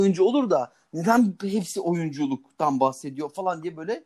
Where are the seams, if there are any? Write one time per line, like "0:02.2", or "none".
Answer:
none